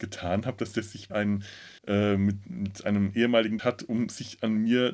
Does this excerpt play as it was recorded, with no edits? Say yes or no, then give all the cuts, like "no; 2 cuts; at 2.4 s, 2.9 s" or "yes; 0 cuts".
no; 3 cuts; at 1.1 s, 1.8 s, 3.6 s